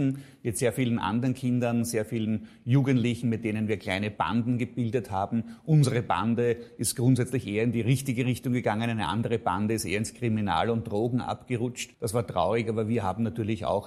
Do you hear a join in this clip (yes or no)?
yes